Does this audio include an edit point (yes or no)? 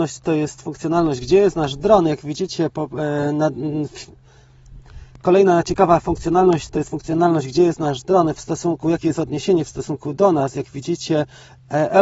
no